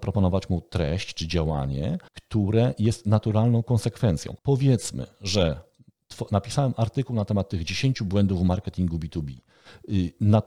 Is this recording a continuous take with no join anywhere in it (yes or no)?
no